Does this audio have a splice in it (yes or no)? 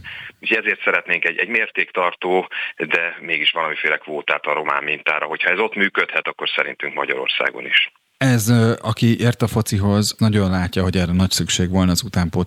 yes